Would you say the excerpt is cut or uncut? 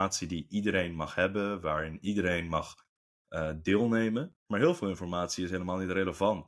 cut